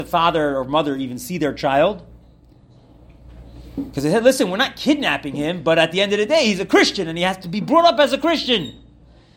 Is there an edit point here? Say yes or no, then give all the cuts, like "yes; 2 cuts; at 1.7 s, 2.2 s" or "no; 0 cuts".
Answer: no; 0 cuts